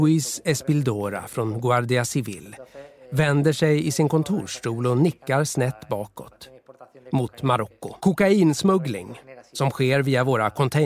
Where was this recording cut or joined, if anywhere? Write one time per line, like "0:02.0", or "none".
0:08.0

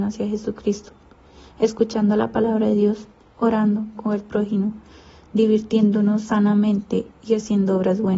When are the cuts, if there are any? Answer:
0:03.9

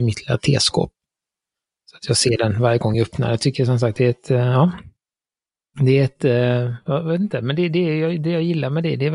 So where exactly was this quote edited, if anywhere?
none

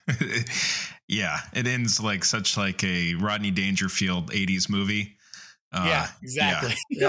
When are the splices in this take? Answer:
none

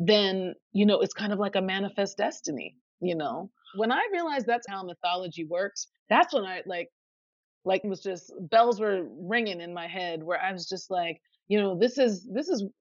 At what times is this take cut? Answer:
0:04.7
0:06.0
0:07.8

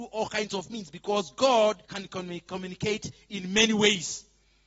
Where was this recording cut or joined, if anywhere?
0:01.8

